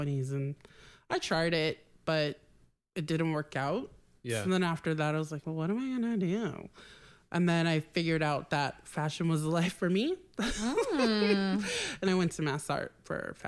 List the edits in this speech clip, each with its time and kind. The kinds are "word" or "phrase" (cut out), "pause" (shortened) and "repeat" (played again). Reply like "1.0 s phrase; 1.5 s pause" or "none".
12.1 s word